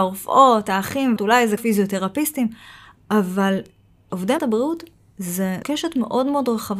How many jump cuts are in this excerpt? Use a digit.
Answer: 4